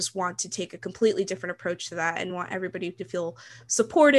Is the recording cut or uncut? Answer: uncut